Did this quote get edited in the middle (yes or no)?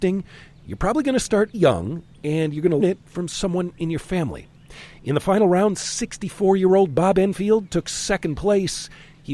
yes